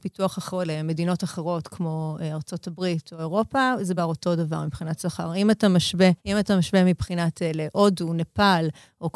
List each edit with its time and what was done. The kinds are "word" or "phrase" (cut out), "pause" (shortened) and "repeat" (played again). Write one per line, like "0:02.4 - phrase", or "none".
0:04.0 - phrase
0:06.2 - pause